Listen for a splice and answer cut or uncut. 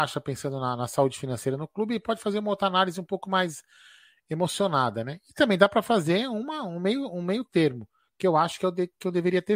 uncut